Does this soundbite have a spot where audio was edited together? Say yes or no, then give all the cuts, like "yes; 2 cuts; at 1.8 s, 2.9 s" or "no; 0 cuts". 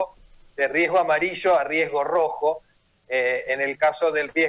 no; 0 cuts